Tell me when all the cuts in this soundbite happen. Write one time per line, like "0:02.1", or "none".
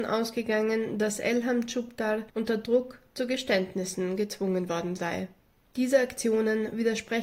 none